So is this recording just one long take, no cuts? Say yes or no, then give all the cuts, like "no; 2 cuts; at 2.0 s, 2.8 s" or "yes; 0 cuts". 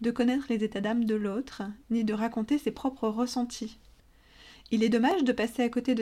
yes; 0 cuts